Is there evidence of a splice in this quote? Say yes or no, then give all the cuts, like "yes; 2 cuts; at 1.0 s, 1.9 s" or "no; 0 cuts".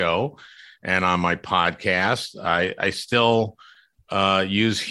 no; 0 cuts